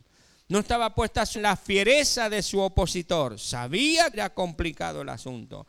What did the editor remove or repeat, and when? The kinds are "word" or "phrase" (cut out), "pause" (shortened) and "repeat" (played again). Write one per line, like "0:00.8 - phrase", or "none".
0:01.3 - word
0:04.1 - word